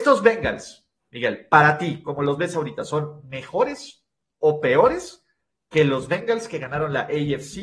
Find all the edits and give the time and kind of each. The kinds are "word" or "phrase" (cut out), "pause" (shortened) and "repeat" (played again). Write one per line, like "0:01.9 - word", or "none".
none